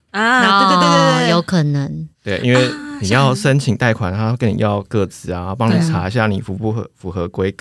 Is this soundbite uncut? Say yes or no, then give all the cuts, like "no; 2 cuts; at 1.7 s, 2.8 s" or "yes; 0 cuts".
no; 1 cut; at 2.1 s